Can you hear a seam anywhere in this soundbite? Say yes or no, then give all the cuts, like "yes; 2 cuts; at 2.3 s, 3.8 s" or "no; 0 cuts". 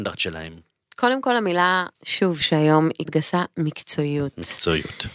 yes; 2 cuts; at 1.9 s, 3.1 s